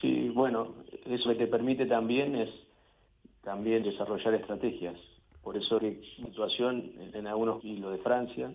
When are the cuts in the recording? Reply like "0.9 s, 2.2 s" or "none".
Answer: 1.3 s, 3.8 s, 5.8 s, 6.3 s, 7.1 s, 7.6 s

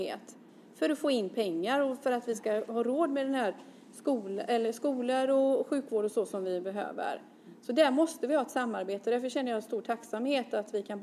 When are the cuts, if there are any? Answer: none

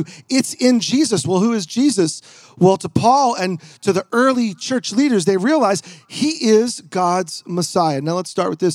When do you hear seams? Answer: none

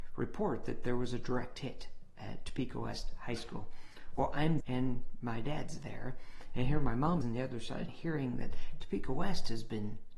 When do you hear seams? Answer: 4.6 s, 7.2 s, 7.9 s

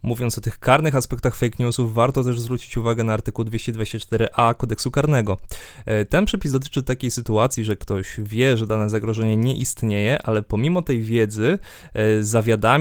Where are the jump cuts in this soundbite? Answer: none

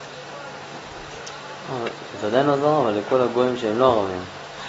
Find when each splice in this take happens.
none

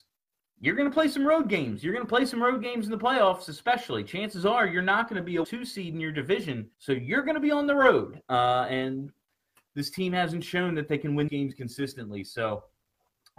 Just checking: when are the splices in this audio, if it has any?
5.4 s, 6.7 s, 11.3 s

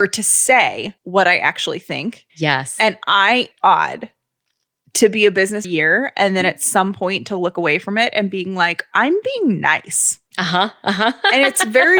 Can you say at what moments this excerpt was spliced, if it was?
1.0 s, 2.3 s, 3.5 s, 5.6 s, 10.3 s

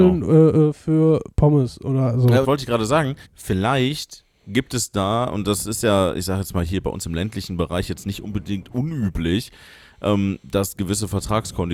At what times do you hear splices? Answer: 2.4 s, 3.2 s

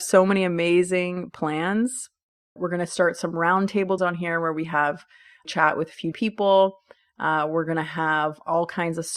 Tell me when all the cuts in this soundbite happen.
2.6 s, 4.0 s, 5.4 s, 6.1 s

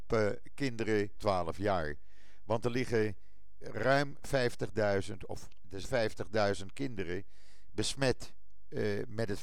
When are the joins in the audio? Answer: 1.2 s, 3.6 s, 5.8 s

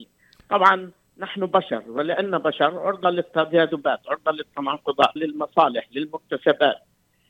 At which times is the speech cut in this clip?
5.2 s

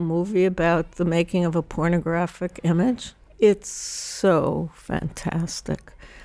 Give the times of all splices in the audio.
3.3 s

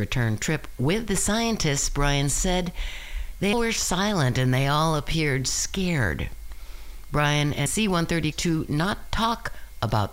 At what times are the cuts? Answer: 3.5 s, 7.7 s, 8.3 s

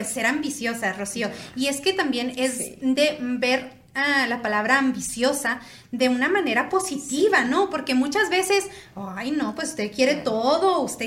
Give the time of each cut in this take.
none

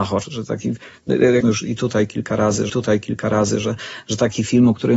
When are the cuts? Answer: 1.4 s, 2.7 s

